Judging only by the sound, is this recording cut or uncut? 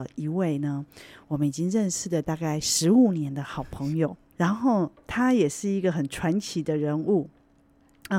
cut